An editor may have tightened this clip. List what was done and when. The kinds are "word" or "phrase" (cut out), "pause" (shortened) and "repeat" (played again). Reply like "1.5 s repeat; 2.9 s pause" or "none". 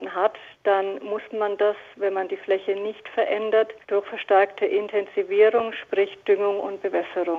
3.8 s pause

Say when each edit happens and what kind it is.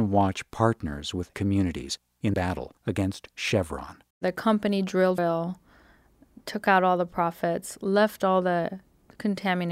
1.3 s word; 2.3 s phrase; 2.8 s pause; 4.1 s pause; 5.2 s word

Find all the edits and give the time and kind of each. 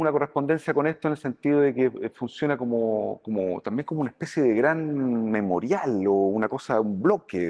none

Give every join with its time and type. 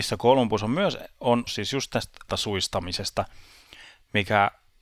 1.5 s word; 2.3 s word

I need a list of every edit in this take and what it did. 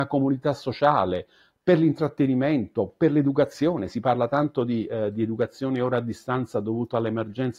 none

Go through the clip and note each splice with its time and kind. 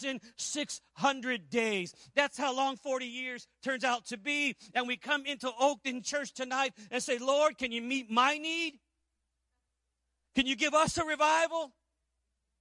9.7 s pause

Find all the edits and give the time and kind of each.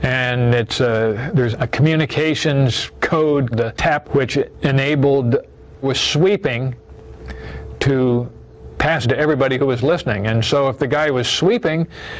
1.5 s word; 3.5 s word; 4.0 s word; 5.8 s word; 9.0 s word

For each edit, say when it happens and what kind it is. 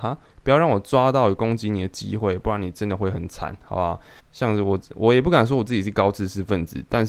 4.2 s pause

